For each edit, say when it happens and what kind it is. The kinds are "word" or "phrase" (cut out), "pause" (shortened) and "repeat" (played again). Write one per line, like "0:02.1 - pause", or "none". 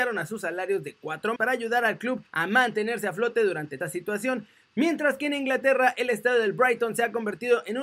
0:01.4 - word
0:02.3 - pause
0:03.8 - phrase